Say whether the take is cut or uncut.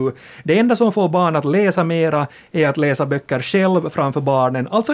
uncut